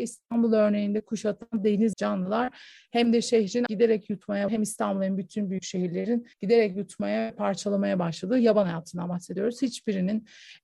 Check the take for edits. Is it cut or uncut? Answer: cut